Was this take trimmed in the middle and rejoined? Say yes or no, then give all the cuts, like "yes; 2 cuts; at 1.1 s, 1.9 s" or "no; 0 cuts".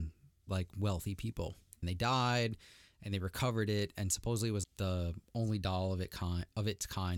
yes; 2 cuts; at 1.8 s, 4.6 s